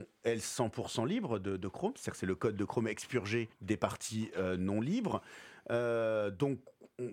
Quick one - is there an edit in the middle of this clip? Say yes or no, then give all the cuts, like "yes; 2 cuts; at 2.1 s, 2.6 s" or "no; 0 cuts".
yes; 1 cut; at 3.5 s